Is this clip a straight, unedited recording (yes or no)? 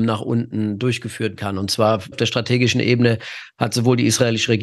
no